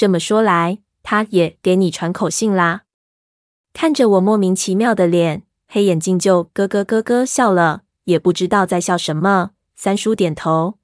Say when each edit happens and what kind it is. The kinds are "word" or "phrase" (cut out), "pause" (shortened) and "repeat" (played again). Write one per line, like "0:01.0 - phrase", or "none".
none